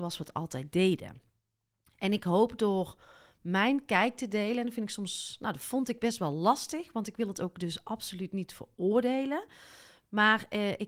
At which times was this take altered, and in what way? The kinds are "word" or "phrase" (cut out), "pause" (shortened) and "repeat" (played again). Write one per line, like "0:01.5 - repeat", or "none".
none

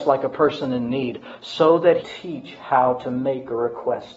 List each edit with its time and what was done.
0:02.0 - phrase

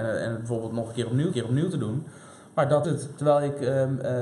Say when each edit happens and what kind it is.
0:01.3 - repeat
0:02.8 - word

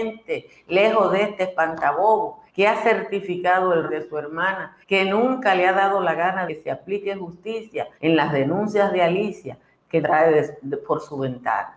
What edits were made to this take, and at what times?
0:02.5 - pause
0:03.9 - phrase
0:04.8 - pause
0:06.5 - word
0:07.9 - pause
0:10.0 - word

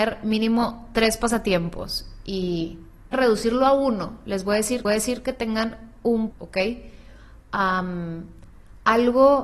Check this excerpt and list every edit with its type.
0:03.1 - phrase
0:04.8 - repeat
0:06.3 - word

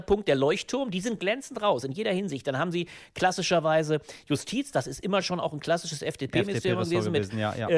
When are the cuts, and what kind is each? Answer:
none

